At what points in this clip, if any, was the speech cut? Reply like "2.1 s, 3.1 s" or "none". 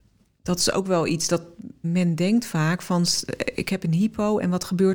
1.8 s